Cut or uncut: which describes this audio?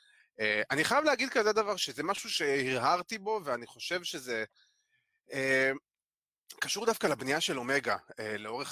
uncut